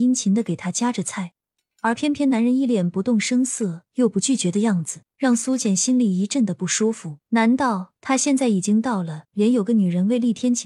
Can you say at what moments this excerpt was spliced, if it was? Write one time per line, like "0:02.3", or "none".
0:05.1
0:07.2

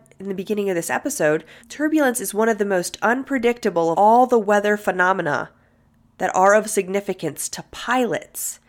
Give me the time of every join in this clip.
0:01.6
0:03.9

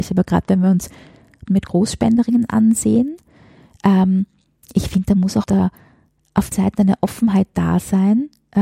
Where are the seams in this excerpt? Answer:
0:01.5
0:05.4
0:06.5

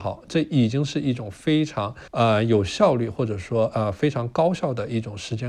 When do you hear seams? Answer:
0:02.1

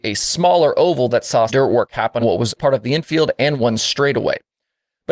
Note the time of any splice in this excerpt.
0:01.5
0:02.2
0:02.6

